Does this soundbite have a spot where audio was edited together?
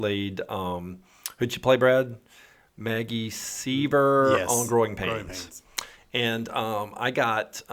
no; 0 cuts

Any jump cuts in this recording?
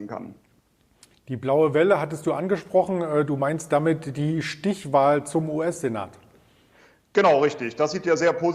no; 0 cuts

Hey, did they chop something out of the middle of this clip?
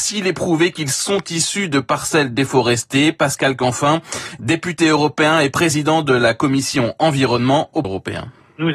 yes; 1 cut; at 7.8 s

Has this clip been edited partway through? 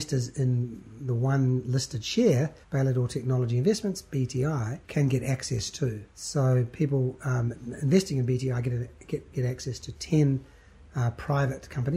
yes; 3 cuts; at 2.6 s, 4.8 s, 6.1 s

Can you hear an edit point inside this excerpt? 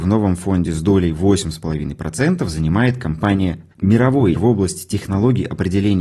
yes; 2 cuts; at 3.7 s, 4.3 s

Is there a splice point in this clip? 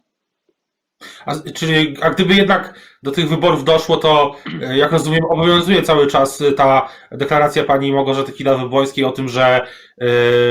no; 0 cuts

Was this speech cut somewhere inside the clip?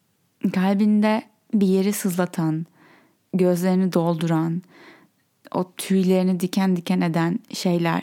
no; 0 cuts

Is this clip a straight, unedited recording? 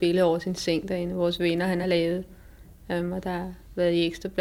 yes; 0 cuts

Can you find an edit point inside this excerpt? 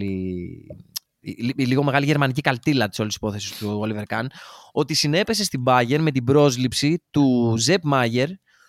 no; 0 cuts

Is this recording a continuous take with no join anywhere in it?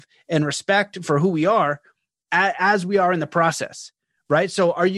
yes; 0 cuts

